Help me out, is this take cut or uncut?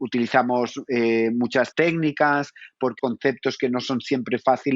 cut